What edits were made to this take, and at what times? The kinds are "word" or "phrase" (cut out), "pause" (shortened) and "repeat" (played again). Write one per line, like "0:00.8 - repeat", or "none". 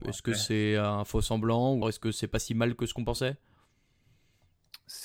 0:01.8 - word

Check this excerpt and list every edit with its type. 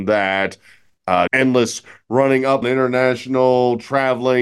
0:01.3 - word
0:02.6 - phrase

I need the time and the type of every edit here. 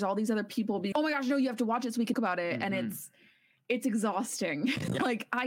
0:00.9 - word
0:02.1 - word

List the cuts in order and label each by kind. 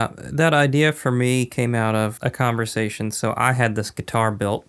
0:02.2 - word

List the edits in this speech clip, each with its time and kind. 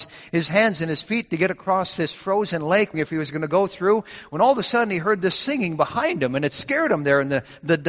0:02.9 - word

